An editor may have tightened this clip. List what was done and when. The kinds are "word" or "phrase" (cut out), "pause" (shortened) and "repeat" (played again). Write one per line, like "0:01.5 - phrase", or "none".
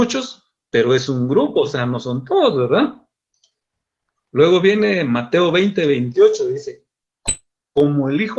none